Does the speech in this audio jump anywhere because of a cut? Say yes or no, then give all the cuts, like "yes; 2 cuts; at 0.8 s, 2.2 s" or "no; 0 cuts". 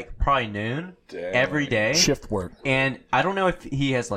no; 0 cuts